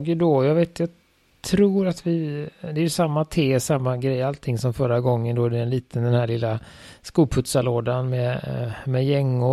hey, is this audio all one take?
yes; 0 cuts

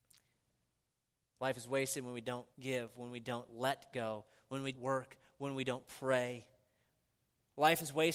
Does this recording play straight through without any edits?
no; 2 cuts; at 2.5 s, 4.7 s

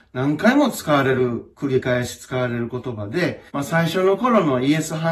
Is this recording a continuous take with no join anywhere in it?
no; 1 cut; at 3.5 s

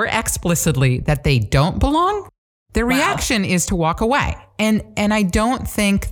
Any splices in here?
no; 0 cuts

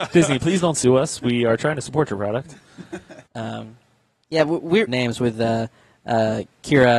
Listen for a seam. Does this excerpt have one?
yes; 2 cuts; at 3.3 s, 4.9 s

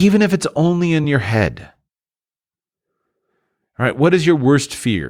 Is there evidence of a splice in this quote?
no; 0 cuts

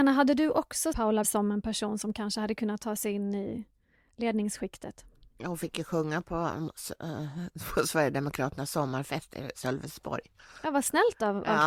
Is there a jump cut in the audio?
yes; 2 cuts; at 0.9 s, 1.2 s

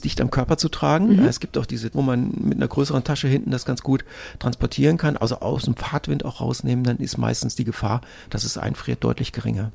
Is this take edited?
yes; 1 cut; at 1.9 s

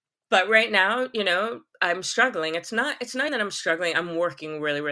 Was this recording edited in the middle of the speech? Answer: yes; 1 cut; at 3.3 s

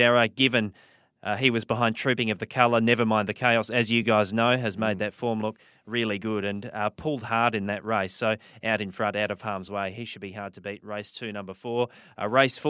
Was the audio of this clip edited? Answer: no; 0 cuts

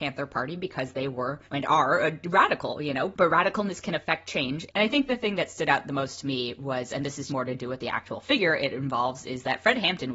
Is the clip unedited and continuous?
no; 2 cuts; at 1.4 s, 7.3 s

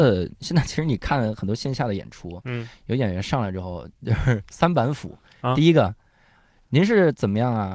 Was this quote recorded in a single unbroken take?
yes; 0 cuts

